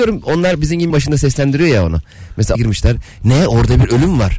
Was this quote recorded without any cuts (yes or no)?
no